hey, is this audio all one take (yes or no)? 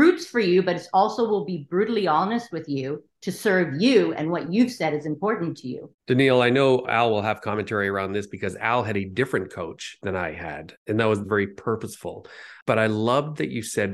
no